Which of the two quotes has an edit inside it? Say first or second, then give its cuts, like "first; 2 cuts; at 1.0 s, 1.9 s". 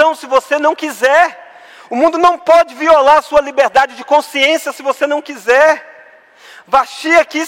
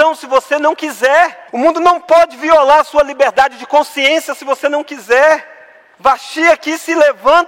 second; 2 cuts; at 1.5 s, 5.9 s